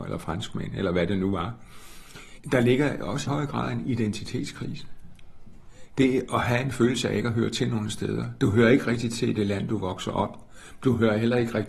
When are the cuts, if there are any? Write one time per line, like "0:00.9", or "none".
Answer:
0:03.3